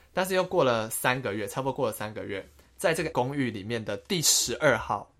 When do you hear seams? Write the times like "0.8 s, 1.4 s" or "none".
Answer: 3.1 s